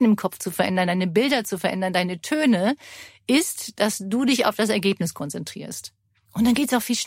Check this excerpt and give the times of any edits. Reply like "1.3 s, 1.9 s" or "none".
none